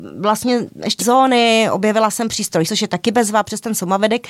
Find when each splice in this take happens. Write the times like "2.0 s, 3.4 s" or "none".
1.0 s, 2.6 s